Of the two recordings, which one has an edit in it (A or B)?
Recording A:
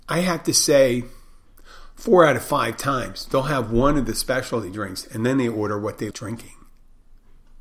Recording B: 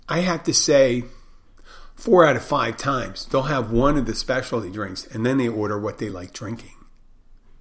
A